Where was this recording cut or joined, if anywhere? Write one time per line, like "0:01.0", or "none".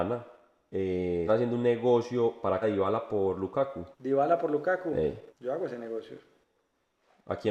0:01.3
0:02.6
0:03.9
0:05.3